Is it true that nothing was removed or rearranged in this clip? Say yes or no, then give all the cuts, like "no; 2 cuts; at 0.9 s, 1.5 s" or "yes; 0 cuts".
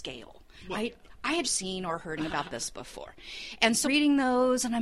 no; 3 cuts; at 1.4 s, 2.2 s, 3.8 s